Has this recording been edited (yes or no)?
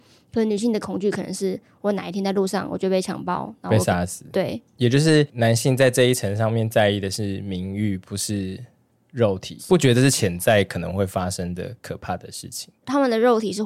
no